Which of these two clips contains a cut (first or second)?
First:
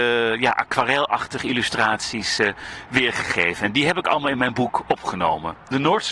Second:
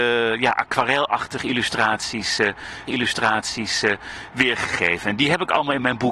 second